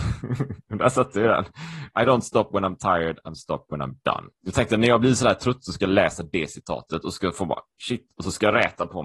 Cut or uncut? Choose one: cut